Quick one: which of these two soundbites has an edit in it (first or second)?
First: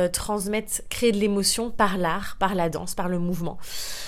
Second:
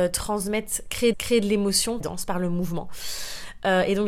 second